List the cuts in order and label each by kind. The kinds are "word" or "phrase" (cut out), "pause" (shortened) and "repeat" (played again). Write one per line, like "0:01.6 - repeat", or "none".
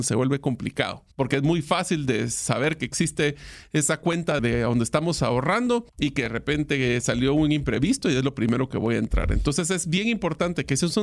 0:01.1 - pause
0:04.4 - word
0:05.9 - pause